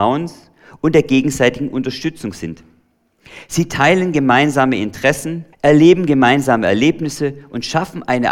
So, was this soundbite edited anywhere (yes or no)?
yes